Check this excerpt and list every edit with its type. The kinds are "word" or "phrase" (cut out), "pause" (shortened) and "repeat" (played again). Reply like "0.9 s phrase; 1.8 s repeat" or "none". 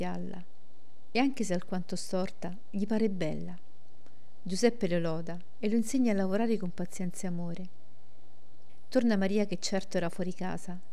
none